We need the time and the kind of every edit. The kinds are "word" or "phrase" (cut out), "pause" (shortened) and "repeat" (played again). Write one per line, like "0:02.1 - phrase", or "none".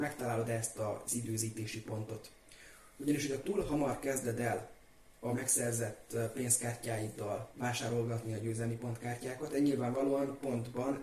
0:09.5 - word